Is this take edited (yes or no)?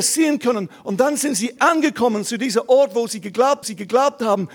yes